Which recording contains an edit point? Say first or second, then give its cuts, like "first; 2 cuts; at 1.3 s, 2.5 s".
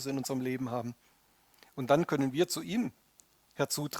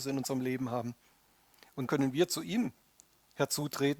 second; 1 cut; at 1.9 s